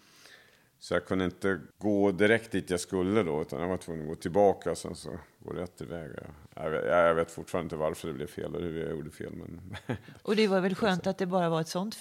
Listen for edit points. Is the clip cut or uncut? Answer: cut